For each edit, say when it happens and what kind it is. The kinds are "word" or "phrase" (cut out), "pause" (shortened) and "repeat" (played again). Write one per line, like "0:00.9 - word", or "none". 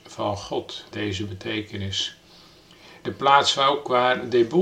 0:00.9 - word